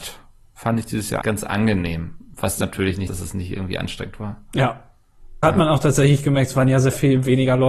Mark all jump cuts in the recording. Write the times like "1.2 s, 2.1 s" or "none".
1.2 s, 3.1 s, 5.4 s

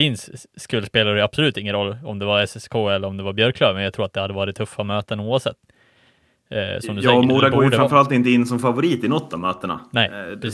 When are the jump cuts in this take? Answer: none

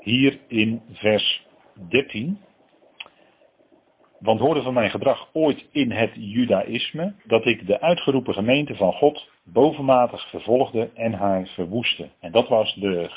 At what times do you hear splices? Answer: 4.4 s, 7.2 s, 9.4 s, 12.1 s

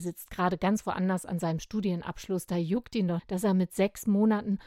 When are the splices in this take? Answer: 3.2 s

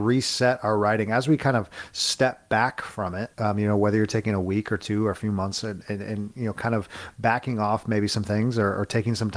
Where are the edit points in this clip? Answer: 3.3 s

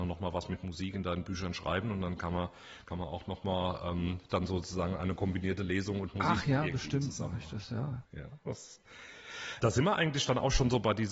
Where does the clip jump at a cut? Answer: 9.6 s

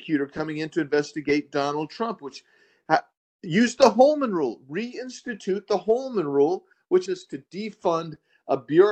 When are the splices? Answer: 7.1 s

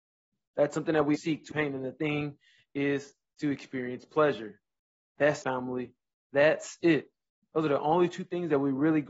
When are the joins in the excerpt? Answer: 1.1 s, 1.5 s, 2.0 s, 5.4 s

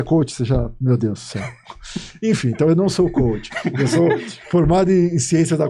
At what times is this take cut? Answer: none

